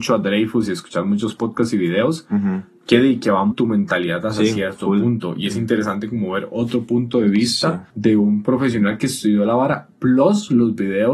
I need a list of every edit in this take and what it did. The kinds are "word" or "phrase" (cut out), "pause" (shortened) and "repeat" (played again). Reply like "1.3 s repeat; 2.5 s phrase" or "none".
3.5 s word